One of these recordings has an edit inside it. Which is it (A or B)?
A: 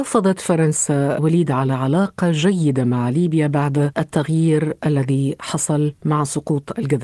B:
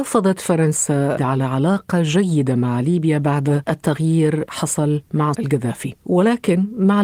B